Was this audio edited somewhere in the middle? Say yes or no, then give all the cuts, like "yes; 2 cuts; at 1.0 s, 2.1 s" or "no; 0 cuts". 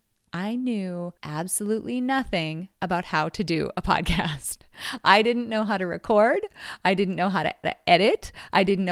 yes; 3 cuts; at 1.2 s, 2.8 s, 7.6 s